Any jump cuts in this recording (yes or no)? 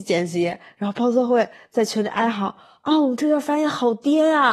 no